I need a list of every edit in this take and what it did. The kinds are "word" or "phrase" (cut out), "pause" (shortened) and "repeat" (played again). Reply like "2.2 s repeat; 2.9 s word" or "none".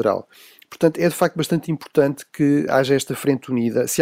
2.7 s word